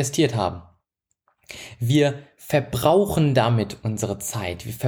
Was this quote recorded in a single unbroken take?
yes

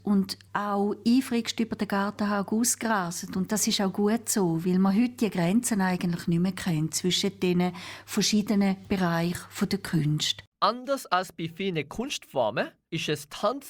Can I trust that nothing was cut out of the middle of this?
yes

